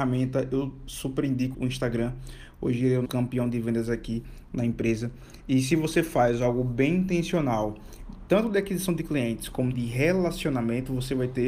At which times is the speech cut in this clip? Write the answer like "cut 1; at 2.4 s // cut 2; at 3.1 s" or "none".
cut 1; at 1.5 s // cut 2; at 3.1 s // cut 3; at 9.7 s